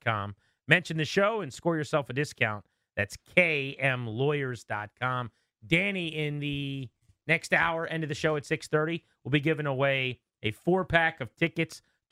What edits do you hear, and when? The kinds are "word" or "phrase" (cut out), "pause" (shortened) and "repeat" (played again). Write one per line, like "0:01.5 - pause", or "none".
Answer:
none